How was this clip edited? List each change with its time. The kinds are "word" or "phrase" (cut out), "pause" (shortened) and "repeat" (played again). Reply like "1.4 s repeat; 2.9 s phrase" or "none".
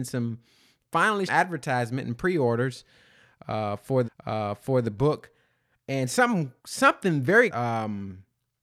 1.3 s phrase; 4.0 s repeat; 6.6 s pause; 7.5 s phrase